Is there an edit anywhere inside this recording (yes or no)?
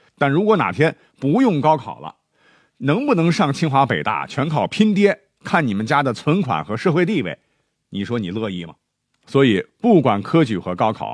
no